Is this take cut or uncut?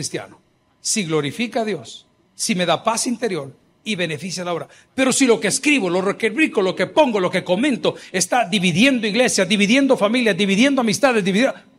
uncut